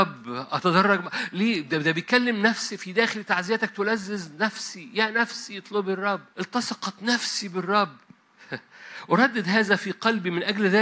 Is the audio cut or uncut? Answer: cut